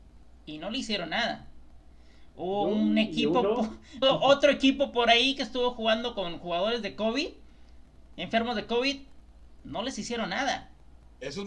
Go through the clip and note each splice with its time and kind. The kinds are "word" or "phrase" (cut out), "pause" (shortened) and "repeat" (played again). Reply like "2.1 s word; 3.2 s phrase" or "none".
4.0 s word